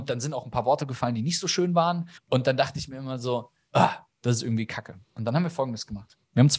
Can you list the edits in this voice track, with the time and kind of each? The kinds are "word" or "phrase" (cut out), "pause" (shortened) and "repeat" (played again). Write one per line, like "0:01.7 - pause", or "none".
0:02.2 - pause